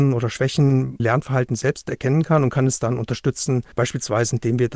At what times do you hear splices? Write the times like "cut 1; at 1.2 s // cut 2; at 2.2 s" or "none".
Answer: cut 1; at 1.0 s // cut 2; at 3.7 s